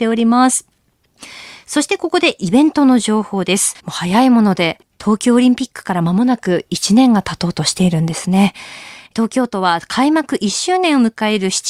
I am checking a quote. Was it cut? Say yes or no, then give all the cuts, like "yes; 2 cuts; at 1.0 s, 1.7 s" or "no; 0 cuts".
yes; 1 cut; at 3.8 s